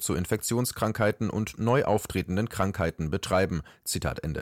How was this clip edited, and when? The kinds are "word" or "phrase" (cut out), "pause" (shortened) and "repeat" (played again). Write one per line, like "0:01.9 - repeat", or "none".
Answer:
none